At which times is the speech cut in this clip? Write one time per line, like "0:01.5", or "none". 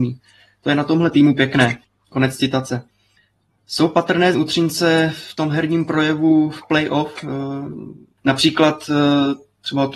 0:04.3